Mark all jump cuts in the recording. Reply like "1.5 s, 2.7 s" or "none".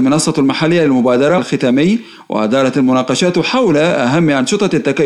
1.4 s